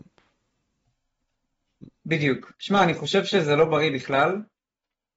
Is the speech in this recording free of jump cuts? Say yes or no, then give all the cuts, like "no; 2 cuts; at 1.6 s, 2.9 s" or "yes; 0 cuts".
no; 1 cut; at 2.5 s